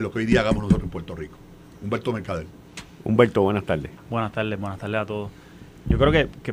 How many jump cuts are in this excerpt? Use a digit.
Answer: 0